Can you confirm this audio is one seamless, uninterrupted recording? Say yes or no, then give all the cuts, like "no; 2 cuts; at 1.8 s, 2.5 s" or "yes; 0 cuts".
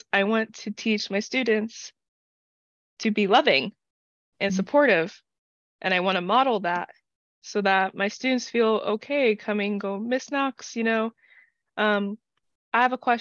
yes; 0 cuts